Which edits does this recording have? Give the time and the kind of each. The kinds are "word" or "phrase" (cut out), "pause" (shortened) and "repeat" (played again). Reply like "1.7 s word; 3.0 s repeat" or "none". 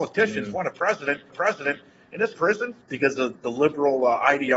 1.3 s repeat; 2.3 s phrase; 2.8 s pause